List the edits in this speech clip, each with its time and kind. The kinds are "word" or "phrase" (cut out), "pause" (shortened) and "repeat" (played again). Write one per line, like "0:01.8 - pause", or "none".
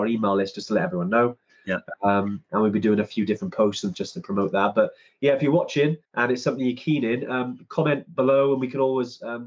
0:03.9 - word
0:06.0 - pause